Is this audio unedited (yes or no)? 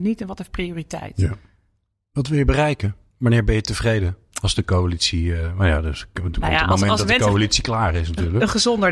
yes